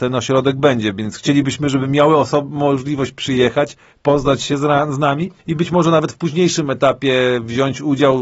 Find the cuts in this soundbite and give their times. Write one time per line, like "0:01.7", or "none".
0:05.4